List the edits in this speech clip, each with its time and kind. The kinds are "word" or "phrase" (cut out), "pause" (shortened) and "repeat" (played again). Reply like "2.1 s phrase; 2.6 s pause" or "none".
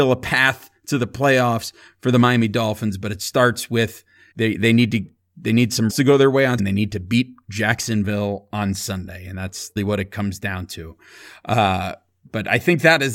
4.3 s word; 5.9 s word; 6.6 s word; 9.8 s word